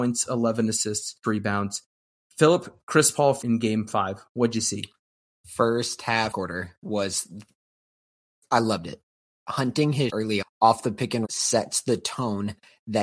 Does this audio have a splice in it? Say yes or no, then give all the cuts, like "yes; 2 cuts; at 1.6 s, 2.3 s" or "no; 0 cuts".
yes; 6 cuts; at 1.2 s, 3.4 s, 6.3 s, 10.1 s, 10.4 s, 11.2 s